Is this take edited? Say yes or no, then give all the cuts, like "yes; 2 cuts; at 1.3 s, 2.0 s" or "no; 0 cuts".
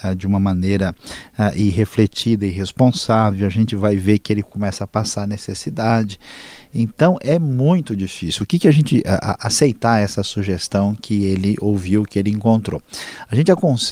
no; 0 cuts